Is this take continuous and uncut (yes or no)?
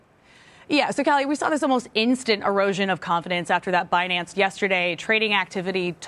no